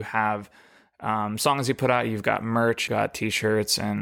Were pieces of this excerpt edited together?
yes; 1 cut; at 2.9 s

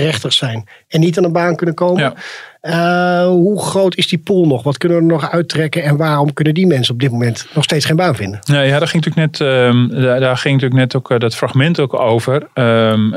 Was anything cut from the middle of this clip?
no; 0 cuts

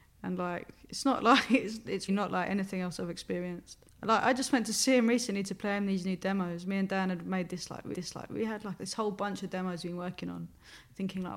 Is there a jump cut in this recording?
yes; 3 cuts; at 2.1 s, 3.9 s, 7.9 s

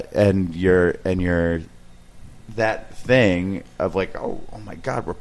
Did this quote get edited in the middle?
no; 0 cuts

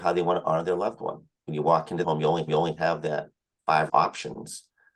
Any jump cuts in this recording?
yes; 5 cuts; at 1.5 s, 2.0 s, 2.5 s, 3.5 s, 3.9 s

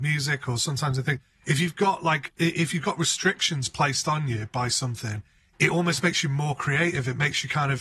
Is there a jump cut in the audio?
no; 0 cuts

